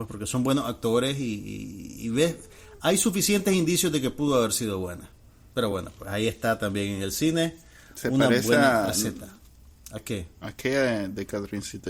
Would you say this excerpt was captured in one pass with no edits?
yes; 0 cuts

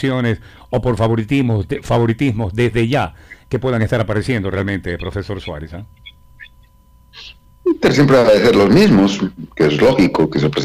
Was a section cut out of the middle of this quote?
no; 0 cuts

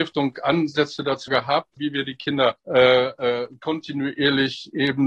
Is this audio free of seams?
no; 3 cuts; at 1.3 s, 1.8 s, 2.6 s

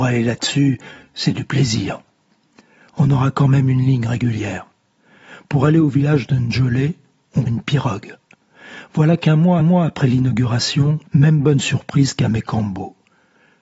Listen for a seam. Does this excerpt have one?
yes; 3 cuts; at 7.5 s, 9.6 s, 11.1 s

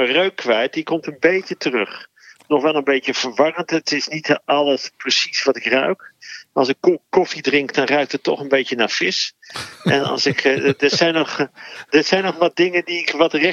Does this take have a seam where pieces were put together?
no; 0 cuts

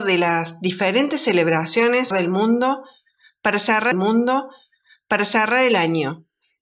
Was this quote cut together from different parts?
yes; 2 cuts; at 2.1 s, 3.9 s

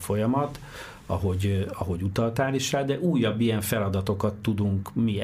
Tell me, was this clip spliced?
no; 0 cuts

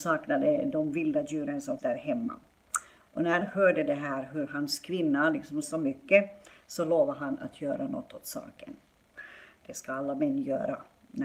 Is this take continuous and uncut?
no; 3 cuts; at 1.8 s, 3.4 s, 5.6 s

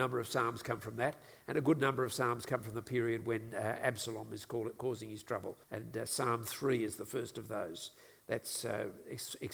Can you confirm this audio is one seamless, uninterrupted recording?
no; 1 cut; at 5.6 s

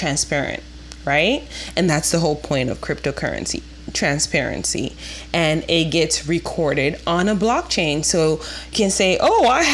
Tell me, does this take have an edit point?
yes; 1 cut; at 8.7 s

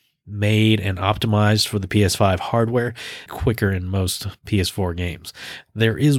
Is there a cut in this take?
yes; 1 cut; at 3.3 s

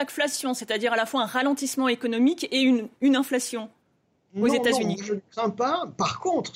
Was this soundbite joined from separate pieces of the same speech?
no; 0 cuts

